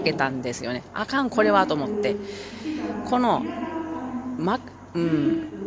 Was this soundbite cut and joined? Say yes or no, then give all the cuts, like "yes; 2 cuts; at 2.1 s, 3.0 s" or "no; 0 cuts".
no; 0 cuts